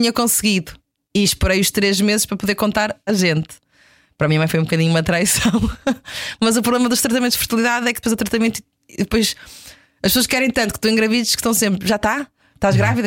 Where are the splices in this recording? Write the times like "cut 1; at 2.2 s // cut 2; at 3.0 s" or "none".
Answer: cut 1; at 3.1 s // cut 2; at 8.0 s